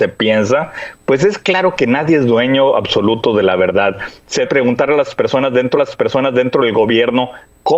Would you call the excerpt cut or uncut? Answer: cut